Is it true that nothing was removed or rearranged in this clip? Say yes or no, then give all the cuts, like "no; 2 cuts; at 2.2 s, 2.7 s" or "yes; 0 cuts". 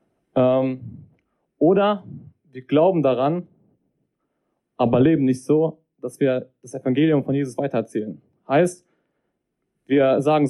yes; 0 cuts